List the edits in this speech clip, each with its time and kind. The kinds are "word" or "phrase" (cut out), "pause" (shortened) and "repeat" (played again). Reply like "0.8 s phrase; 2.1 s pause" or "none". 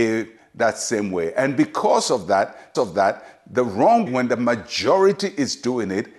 2.7 s repeat; 4.1 s word